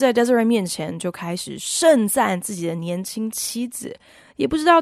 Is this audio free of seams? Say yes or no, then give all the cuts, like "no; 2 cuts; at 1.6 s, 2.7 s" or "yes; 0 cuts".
yes; 0 cuts